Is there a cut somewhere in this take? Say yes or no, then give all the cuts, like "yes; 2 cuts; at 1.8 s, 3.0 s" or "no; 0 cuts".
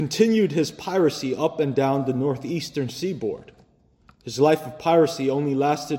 no; 0 cuts